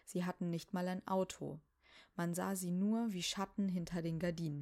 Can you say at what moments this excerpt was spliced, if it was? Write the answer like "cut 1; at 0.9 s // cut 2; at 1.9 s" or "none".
none